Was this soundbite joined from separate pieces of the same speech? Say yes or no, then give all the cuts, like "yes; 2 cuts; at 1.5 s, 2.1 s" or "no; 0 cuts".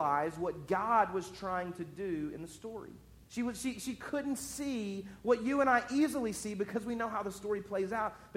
yes; 1 cut; at 3.2 s